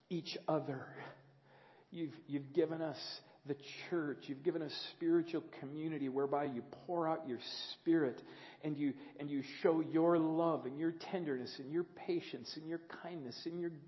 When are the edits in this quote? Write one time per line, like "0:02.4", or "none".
none